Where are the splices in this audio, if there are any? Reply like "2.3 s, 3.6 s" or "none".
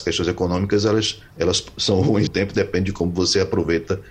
1.3 s, 2.3 s